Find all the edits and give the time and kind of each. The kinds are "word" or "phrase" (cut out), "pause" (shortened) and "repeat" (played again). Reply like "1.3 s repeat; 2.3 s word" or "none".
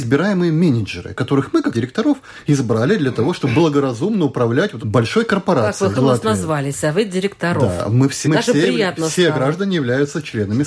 1.7 s word; 4.8 s word; 5.9 s word; 8.2 s word